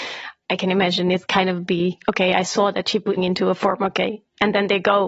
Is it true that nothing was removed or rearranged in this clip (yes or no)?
no